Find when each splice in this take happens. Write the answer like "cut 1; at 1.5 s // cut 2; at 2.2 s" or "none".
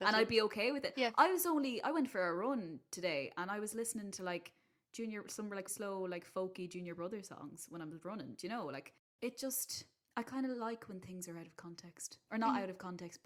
cut 1; at 5.7 s // cut 2; at 10.0 s